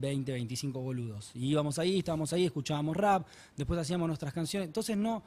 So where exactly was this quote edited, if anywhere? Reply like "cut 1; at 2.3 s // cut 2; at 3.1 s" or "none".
none